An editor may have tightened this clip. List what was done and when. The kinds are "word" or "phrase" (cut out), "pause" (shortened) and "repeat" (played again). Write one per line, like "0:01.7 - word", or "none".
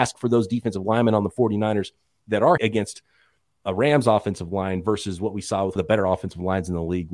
0:02.6 - word
0:05.8 - word

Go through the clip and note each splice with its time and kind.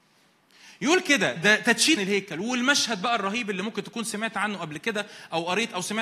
0:01.4 - word
0:02.0 - phrase

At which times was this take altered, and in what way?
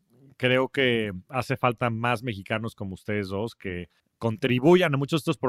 0:01.2 - pause
0:04.0 - pause

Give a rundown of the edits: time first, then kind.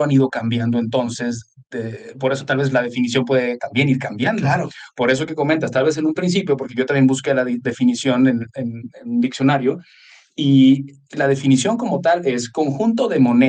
none

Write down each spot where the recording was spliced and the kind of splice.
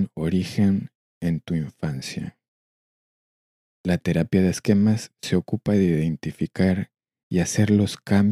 none

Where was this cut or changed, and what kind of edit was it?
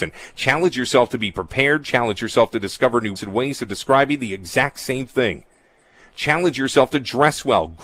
0:03.2 - word

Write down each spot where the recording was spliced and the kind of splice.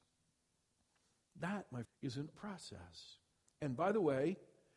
0:01.8 - word
0:02.3 - word

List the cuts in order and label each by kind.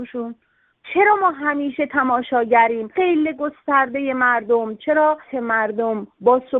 0:03.0 - word
0:05.3 - word

